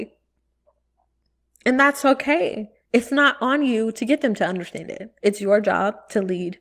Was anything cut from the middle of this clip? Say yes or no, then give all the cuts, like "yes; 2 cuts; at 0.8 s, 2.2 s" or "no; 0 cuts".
yes; 2 cuts; at 2.8 s, 5.2 s